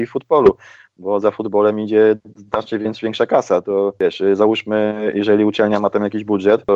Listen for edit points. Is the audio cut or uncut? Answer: uncut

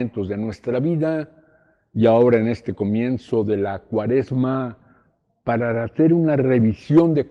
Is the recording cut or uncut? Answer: uncut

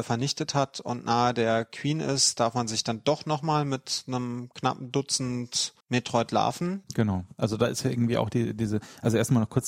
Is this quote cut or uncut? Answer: cut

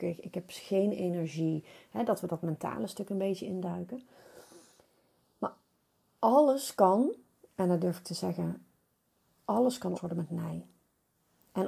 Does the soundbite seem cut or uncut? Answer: cut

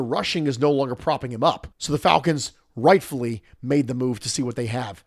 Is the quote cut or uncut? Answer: cut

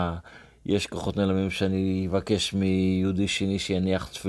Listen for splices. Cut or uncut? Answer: uncut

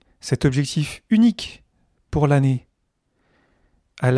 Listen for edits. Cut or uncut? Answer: uncut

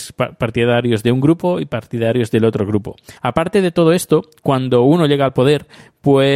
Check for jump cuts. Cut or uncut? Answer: cut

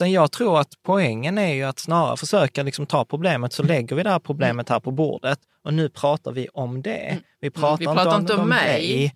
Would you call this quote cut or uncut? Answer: uncut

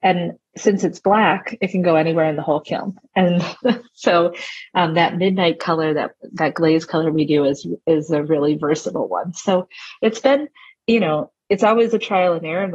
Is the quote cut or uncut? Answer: uncut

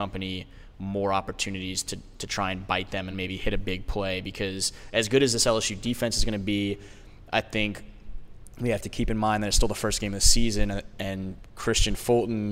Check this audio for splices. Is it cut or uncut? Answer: uncut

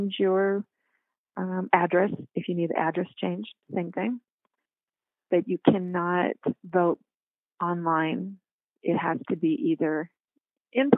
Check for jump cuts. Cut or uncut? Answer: uncut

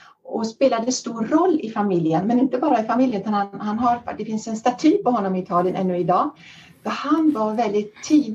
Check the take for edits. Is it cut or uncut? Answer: uncut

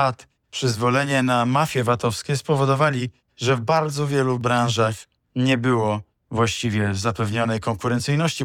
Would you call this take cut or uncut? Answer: uncut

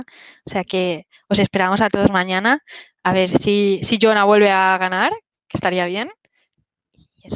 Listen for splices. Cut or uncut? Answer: uncut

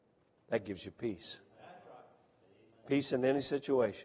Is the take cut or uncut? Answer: uncut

